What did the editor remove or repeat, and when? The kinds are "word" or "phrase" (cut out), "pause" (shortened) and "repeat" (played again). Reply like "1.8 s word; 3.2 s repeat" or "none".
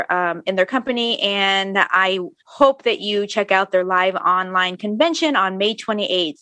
2.4 s pause